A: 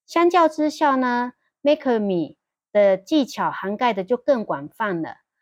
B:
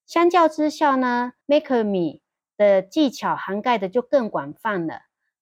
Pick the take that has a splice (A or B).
B